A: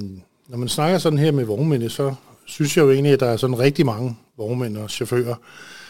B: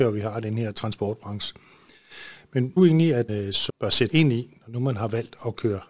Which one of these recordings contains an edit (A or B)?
B